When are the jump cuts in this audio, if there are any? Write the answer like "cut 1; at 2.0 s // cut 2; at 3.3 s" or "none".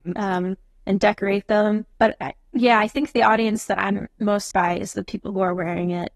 cut 1; at 1.9 s // cut 2; at 4.5 s